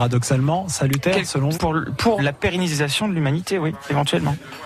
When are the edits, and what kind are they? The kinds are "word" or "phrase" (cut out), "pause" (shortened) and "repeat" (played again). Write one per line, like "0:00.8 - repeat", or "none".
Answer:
0:01.5 - word
0:02.2 - word